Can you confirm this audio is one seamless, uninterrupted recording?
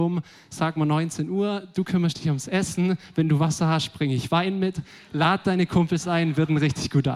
yes; 0 cuts

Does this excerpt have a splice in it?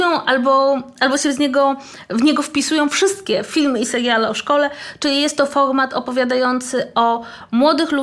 no; 0 cuts

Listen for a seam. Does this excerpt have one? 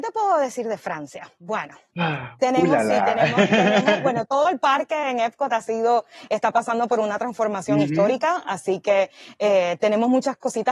no; 0 cuts

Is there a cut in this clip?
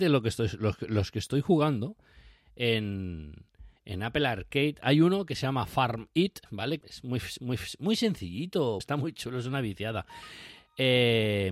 yes; 5 cuts; at 3.8 s, 6.5 s, 6.8 s, 7.4 s, 8.8 s

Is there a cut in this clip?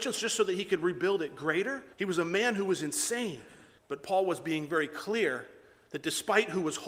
yes; 2 cuts; at 1.9 s, 3.8 s

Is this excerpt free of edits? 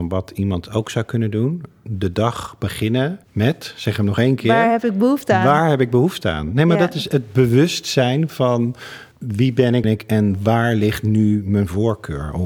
no; 3 cuts; at 3.2 s, 9.1 s, 9.8 s

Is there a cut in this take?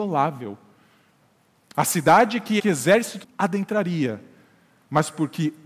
yes; 2 cuts; at 2.6 s, 3.2 s

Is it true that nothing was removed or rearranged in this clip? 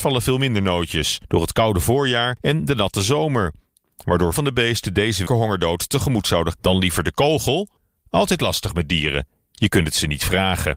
no; 3 cuts; at 4.3 s, 5.3 s, 6.5 s

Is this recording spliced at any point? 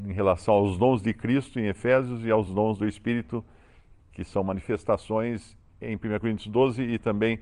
no; 0 cuts

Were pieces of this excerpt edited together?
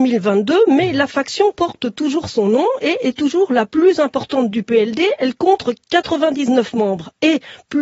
no; 0 cuts

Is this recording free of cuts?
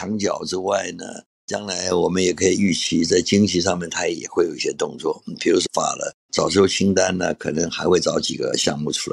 no; 1 cut; at 5.7 s

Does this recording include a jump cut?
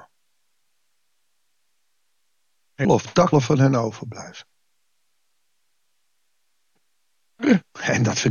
yes; 2 cuts; at 2.8 s, 3.3 s

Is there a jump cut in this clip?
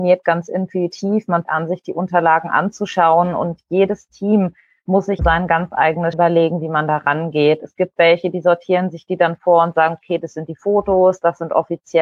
yes; 3 cuts; at 1.4 s, 5.2 s, 6.1 s

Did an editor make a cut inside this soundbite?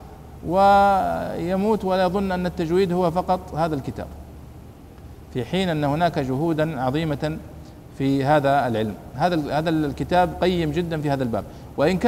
no; 0 cuts

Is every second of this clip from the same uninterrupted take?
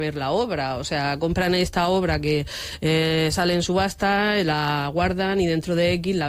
yes; 0 cuts

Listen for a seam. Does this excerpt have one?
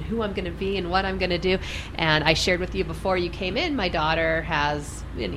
no; 0 cuts

